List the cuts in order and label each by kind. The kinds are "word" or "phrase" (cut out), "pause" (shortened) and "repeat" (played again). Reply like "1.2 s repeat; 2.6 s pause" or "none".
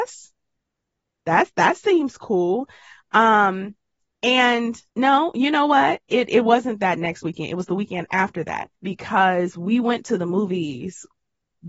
4.9 s pause; 8.8 s pause